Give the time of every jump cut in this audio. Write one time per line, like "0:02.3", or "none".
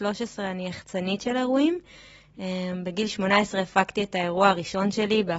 none